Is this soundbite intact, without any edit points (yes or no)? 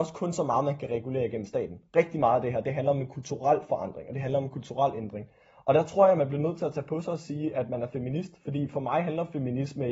yes